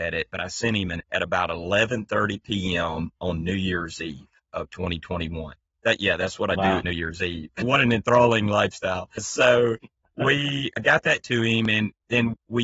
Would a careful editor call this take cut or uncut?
cut